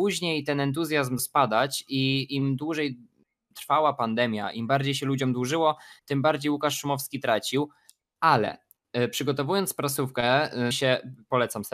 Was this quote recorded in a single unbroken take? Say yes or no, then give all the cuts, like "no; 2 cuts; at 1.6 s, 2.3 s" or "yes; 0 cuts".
no; 2 cuts; at 1.2 s, 10.7 s